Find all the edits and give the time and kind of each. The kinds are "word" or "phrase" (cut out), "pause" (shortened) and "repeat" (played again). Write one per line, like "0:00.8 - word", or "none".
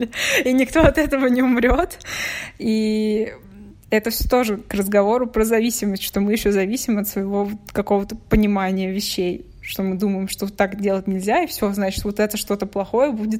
0:03.8 - pause